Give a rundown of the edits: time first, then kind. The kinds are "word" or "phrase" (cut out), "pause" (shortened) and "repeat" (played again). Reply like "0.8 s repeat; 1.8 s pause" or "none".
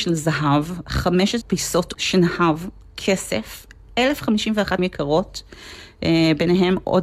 1.4 s word; 1.9 s word; 4.8 s word